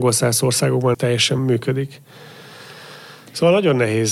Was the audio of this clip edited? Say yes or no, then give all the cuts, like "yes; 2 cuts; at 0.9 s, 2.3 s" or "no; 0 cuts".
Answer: yes; 2 cuts; at 0.9 s, 1.4 s